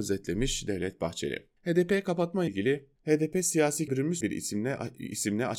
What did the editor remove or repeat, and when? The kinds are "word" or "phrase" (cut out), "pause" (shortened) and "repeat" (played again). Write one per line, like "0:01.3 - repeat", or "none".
0:01.6 - pause
0:02.5 - word
0:03.0 - pause
0:03.9 - word
0:04.2 - phrase